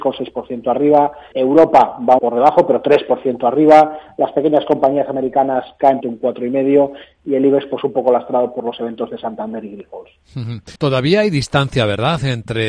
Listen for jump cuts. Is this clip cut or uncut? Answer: cut